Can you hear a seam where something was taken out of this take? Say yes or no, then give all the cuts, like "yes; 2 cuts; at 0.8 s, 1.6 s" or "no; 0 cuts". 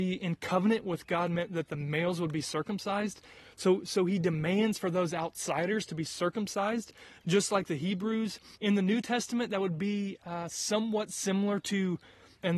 yes; 1 cut; at 8.6 s